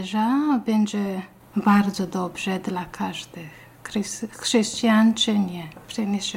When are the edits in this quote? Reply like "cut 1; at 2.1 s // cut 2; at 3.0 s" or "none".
none